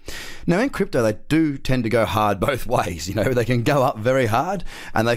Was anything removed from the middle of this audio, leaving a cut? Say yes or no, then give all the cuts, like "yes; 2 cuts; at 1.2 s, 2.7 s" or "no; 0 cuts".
no; 0 cuts